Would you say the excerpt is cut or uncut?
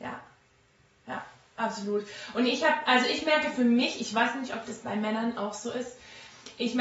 uncut